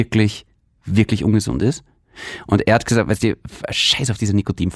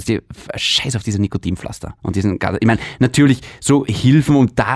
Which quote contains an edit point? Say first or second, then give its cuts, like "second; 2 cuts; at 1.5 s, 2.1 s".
second; 1 cut; at 2.0 s